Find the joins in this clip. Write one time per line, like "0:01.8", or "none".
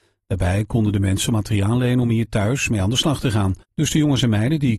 0:03.6